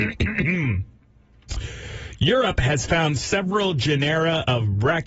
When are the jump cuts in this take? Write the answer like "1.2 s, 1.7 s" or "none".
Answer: none